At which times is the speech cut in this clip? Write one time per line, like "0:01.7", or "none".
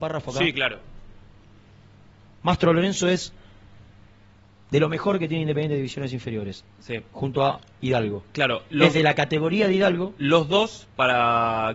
none

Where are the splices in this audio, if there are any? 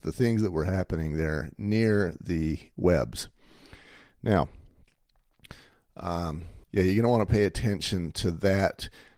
0:06.6

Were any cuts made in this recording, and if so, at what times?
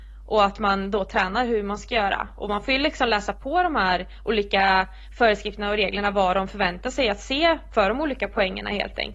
none

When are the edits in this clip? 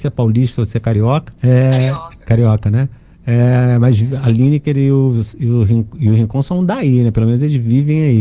0:01.3

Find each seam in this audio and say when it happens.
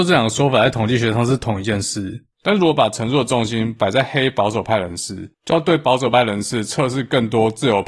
0:05.3

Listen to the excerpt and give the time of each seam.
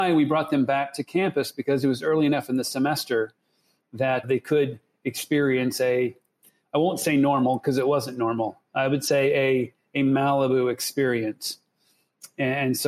0:04.2

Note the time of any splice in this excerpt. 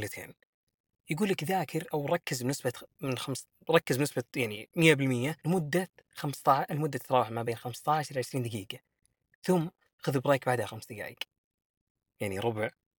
0:05.4

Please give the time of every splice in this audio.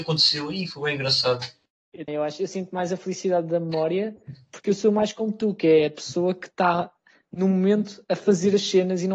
0:02.1

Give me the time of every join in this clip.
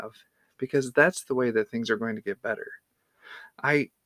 none

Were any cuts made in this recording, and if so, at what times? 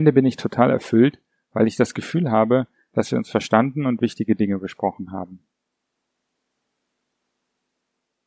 none

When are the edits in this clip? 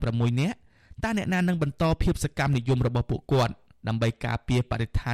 none

